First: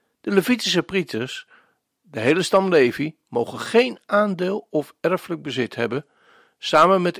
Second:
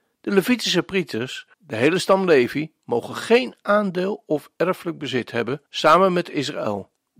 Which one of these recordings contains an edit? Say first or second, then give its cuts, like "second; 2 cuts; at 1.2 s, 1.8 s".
second; 2 cuts; at 1.5 s, 5.7 s